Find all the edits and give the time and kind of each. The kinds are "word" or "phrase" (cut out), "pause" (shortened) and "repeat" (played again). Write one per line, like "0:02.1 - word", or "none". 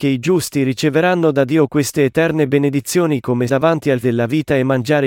0:03.5 - word
0:04.0 - word